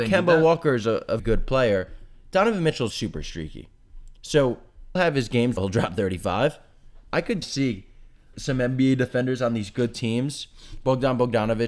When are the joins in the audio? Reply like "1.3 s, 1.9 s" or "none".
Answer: 1.2 s, 2.9 s, 5.0 s, 5.6 s, 7.1 s, 7.4 s, 8.3 s